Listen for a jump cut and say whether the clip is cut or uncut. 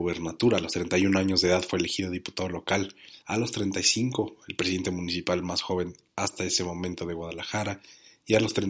cut